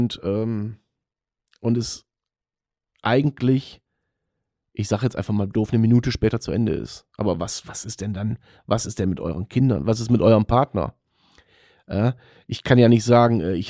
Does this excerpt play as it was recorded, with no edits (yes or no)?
yes